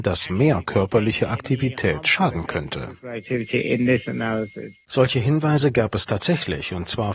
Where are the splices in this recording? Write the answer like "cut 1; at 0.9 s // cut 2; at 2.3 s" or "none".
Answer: none